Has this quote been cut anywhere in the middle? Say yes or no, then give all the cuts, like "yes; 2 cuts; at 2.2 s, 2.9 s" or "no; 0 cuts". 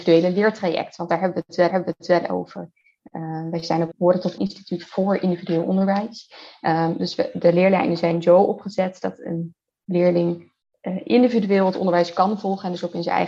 yes; 4 cuts; at 1.7 s, 3.9 s, 4.4 s, 10.6 s